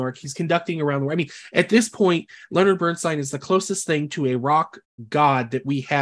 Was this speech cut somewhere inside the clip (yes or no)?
no